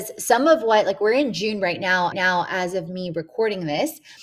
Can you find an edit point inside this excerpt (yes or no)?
yes